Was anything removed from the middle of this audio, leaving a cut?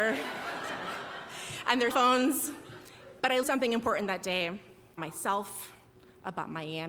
yes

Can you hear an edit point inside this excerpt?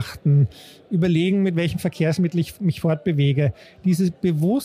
no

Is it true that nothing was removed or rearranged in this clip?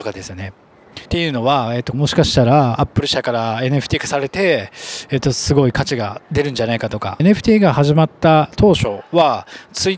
no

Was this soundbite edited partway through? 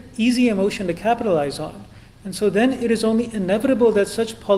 no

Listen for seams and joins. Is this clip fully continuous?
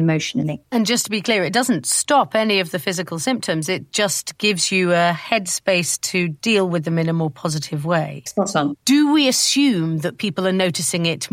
yes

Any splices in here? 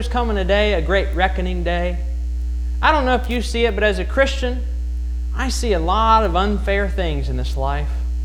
no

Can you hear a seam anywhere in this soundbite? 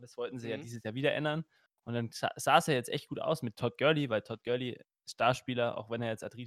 no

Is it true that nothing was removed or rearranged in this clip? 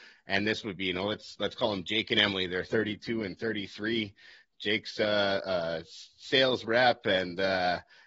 yes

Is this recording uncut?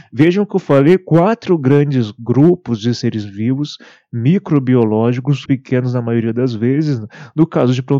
no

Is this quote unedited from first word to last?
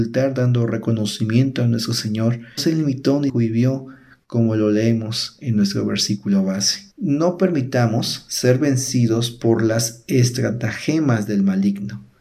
no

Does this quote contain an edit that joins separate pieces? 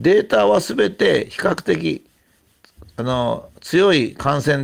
no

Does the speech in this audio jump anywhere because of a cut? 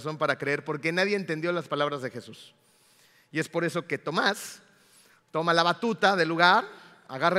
no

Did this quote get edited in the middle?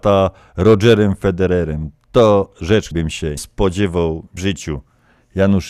yes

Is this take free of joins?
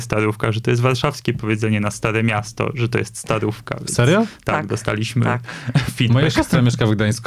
yes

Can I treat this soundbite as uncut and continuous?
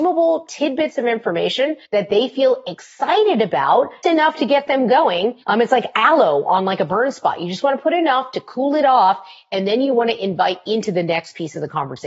no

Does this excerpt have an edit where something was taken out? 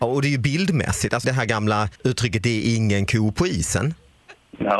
yes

